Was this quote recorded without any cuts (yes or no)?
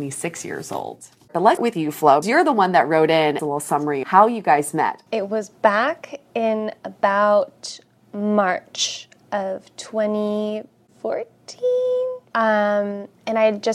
no